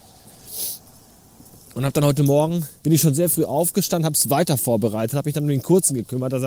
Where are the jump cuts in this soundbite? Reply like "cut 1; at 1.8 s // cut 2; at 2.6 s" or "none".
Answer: cut 1; at 2.8 s